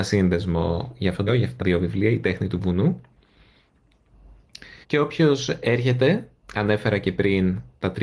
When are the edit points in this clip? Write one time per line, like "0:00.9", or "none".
0:01.3
0:01.6
0:04.8
0:06.4